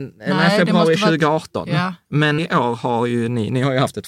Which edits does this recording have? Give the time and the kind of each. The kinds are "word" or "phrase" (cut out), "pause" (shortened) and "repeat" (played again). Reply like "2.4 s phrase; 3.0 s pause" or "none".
2.4 s word